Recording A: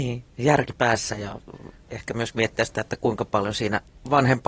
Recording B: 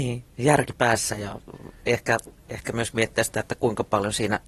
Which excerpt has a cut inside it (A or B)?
A